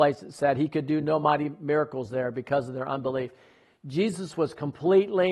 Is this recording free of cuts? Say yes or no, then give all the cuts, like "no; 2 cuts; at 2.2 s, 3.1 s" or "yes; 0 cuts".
yes; 0 cuts